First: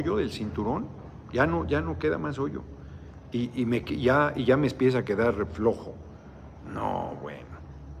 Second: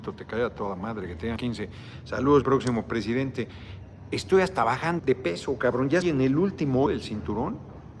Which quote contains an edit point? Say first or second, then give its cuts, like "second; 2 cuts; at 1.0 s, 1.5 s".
second; 5 cuts; at 1.4 s, 2.4 s, 5.0 s, 6.0 s, 6.9 s